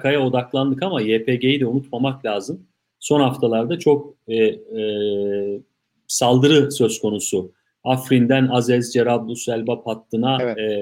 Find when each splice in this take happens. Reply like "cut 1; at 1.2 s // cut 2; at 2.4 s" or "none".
none